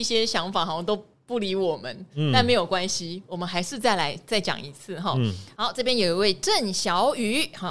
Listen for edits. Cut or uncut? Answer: uncut